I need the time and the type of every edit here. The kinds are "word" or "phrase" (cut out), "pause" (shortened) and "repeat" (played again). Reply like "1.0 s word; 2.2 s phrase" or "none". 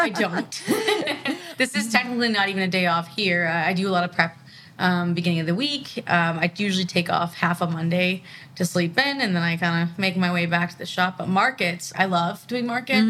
none